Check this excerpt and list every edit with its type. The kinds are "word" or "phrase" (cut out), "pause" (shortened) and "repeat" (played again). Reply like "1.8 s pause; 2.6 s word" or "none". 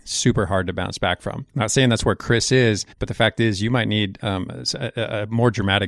1.5 s pause; 2.9 s pause

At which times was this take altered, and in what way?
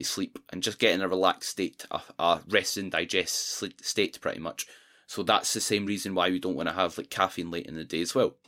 none

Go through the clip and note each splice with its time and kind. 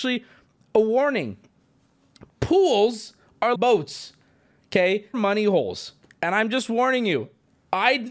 3.6 s word; 5.1 s phrase

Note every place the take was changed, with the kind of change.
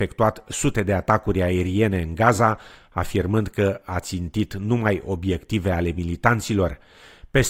none

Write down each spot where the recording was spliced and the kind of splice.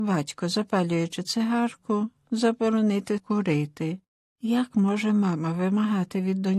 3.2 s word

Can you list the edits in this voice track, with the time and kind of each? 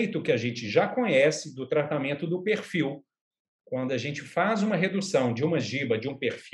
none

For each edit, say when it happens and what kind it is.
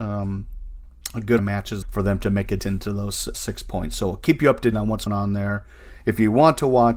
1.4 s word; 1.8 s word; 2.6 s word; 3.3 s word; 4.7 s word; 5.1 s word

